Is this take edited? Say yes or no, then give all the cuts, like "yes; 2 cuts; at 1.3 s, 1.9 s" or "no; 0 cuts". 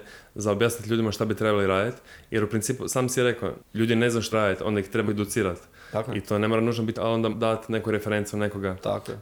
yes; 5 cuts; at 3.6 s, 4.3 s, 5.1 s, 6.9 s, 7.3 s